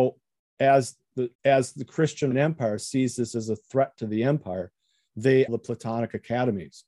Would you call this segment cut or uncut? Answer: cut